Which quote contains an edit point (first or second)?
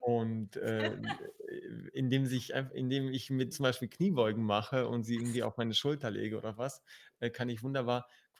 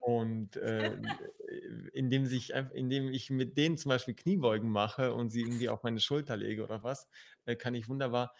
first